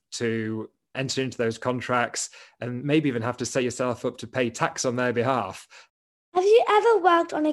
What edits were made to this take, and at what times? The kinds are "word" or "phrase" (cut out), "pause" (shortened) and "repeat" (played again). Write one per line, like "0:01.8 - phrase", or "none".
0:00.9 - word